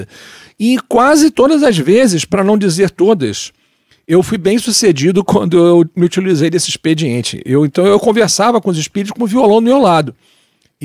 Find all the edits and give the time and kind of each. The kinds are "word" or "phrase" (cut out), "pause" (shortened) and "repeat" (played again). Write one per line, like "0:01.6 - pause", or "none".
none